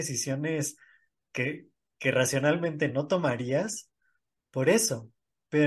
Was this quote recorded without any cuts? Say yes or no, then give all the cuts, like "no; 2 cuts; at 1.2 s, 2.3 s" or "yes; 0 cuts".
yes; 0 cuts